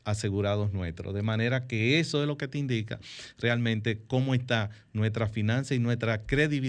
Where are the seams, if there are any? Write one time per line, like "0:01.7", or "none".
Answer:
none